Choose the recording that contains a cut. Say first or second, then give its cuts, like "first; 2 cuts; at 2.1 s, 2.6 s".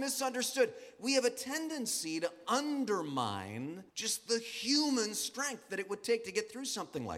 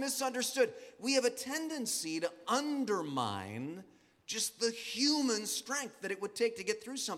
first; 1 cut; at 3.9 s